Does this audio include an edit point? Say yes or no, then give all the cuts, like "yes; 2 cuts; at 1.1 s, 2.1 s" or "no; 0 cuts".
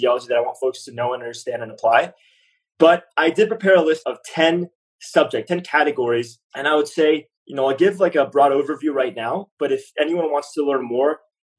no; 0 cuts